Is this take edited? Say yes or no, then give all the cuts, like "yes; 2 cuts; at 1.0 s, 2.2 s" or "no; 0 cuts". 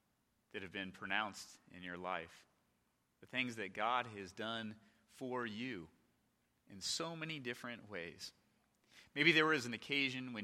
no; 0 cuts